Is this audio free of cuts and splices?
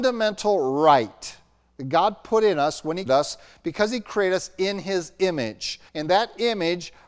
no; 2 cuts; at 3.1 s, 5.9 s

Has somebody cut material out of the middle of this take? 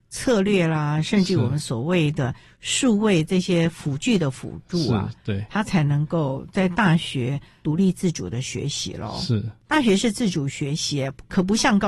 no; 0 cuts

